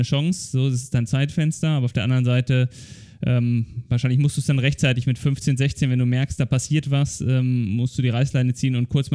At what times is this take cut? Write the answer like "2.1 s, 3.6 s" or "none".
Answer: none